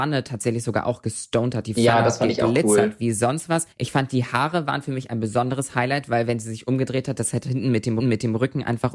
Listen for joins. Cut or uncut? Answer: cut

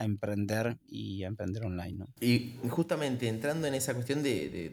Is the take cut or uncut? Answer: cut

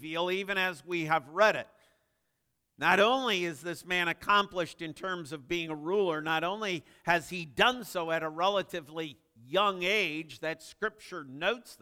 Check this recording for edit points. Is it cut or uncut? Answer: uncut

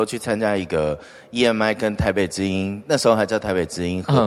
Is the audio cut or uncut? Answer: uncut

